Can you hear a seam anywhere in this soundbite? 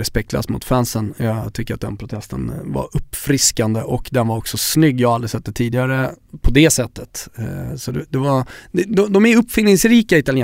no; 0 cuts

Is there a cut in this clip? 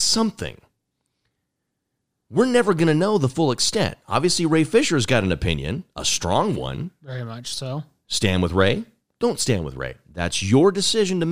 no; 0 cuts

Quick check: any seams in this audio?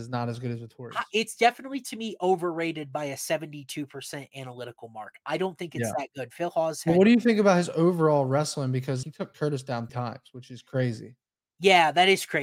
yes; 4 cuts; at 1.4 s, 9.0 s, 9.3 s, 9.9 s

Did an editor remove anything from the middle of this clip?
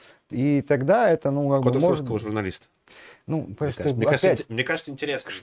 no; 0 cuts

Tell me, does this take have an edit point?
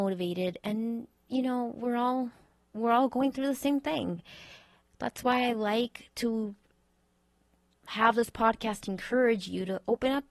no; 0 cuts

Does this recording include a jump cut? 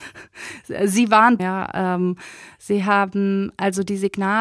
yes; 1 cut; at 1.4 s

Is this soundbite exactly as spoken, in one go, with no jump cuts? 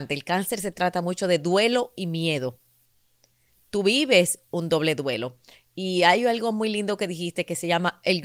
yes; 0 cuts

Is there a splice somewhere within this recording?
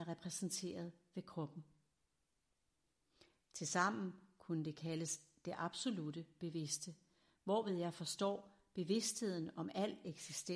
no; 0 cuts

